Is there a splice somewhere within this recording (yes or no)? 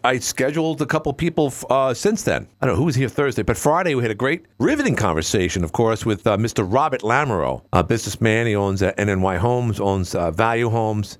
yes